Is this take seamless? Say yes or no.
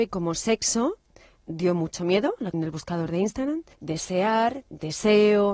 no